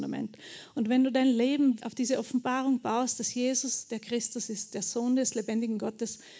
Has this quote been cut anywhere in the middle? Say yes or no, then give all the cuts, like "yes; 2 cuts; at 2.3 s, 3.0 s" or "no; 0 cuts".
yes; 1 cut; at 1.8 s